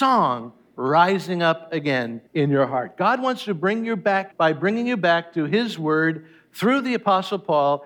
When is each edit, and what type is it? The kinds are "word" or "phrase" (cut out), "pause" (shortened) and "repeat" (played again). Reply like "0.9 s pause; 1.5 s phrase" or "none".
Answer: 2.3 s pause; 4.3 s phrase